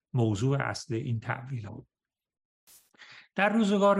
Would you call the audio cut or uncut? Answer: cut